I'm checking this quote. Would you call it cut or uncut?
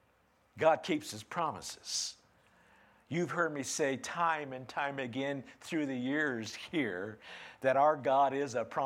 uncut